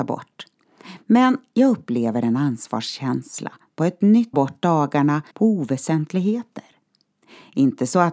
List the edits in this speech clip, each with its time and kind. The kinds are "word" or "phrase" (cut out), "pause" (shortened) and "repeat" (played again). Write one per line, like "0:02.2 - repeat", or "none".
0:04.3 - phrase
0:05.3 - pause